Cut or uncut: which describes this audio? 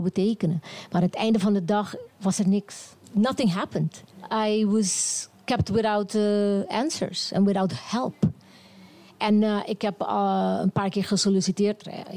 uncut